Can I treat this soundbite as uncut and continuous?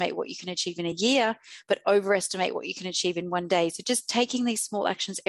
yes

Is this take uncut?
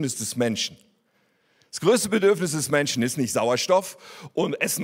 yes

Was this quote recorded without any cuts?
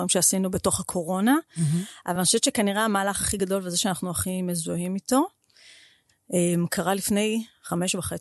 yes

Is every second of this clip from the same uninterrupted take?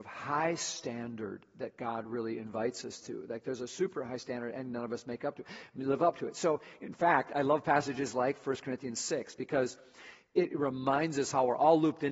yes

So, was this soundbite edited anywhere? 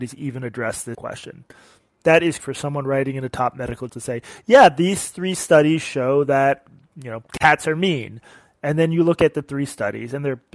yes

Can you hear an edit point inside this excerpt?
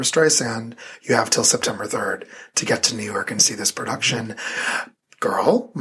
no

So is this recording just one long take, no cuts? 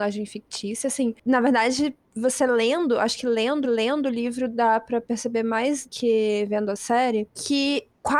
no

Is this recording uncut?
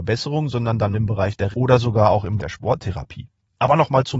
no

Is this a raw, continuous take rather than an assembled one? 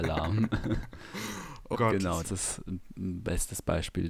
no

